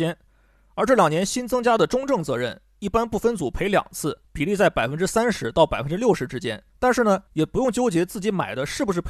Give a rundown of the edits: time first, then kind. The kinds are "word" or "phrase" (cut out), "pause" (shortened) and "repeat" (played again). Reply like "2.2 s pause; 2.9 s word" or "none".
4.2 s pause; 6.7 s pause; 7.3 s pause